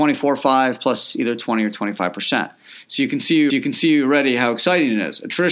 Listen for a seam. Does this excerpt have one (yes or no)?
yes